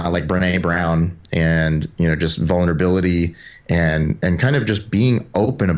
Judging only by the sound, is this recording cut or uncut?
uncut